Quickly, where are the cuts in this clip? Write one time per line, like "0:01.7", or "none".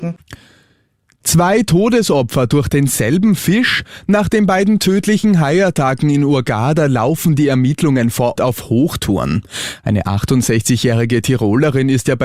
0:08.4